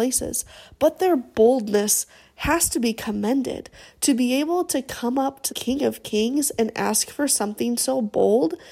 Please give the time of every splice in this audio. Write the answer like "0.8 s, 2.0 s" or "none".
5.5 s